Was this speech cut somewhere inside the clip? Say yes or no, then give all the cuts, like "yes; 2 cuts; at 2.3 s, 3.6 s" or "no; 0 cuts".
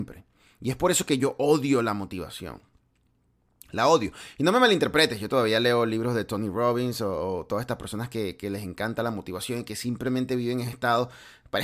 yes; 1 cut; at 10.7 s